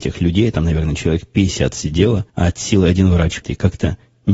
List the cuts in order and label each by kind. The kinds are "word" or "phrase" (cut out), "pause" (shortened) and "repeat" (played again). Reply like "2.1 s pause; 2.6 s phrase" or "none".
2.3 s pause; 3.4 s word